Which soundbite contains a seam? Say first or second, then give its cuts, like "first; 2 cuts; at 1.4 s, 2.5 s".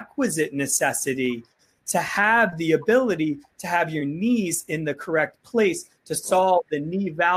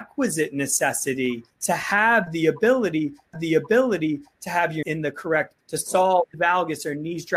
second; 5 cuts; at 1.5 s, 3.3 s, 4.8 s, 5.6 s, 6.3 s